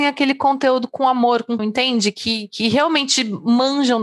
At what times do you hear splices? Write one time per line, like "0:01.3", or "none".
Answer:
0:01.6